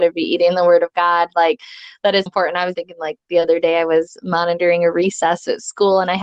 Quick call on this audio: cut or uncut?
cut